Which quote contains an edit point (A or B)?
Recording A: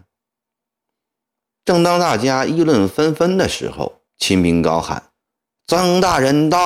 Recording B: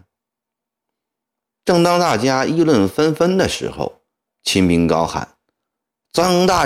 A